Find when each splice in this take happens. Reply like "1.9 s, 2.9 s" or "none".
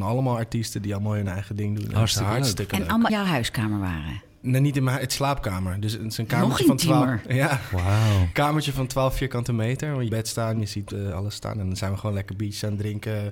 3.1 s, 5.2 s, 10.1 s